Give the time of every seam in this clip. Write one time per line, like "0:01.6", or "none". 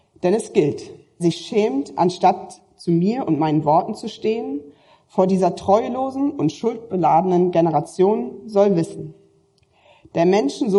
0:01.2

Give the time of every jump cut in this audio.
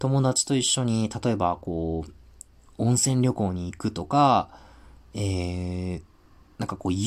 none

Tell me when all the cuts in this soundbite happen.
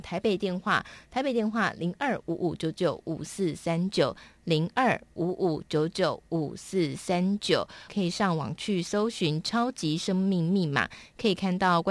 0:07.9

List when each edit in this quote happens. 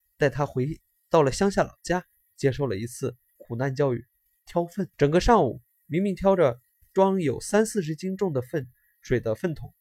0:04.9

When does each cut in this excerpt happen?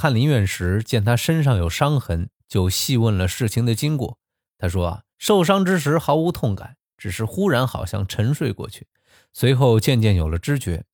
0:05.1

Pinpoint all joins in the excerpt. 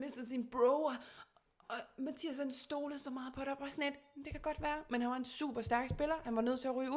none

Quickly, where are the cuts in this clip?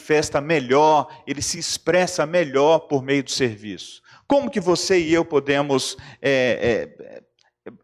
none

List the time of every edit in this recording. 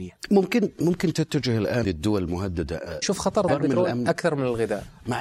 0:01.8
0:03.0
0:03.5

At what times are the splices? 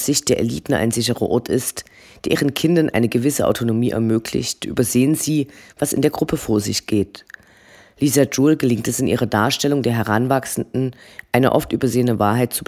none

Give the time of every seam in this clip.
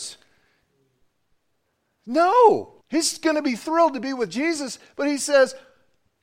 0:02.8

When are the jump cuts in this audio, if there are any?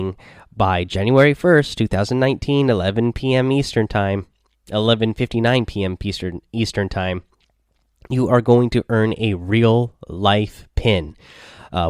none

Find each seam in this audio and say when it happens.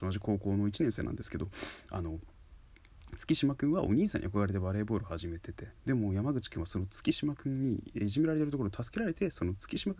0:05.8

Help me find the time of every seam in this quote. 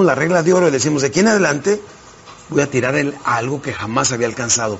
none

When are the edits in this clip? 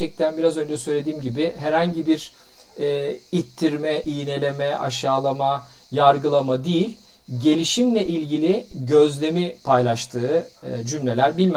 none

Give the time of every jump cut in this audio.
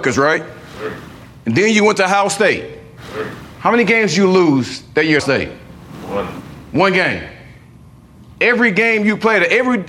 0:05.2

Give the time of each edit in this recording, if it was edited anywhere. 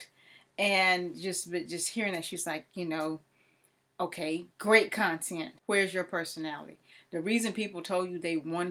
0:04.5
0:05.6

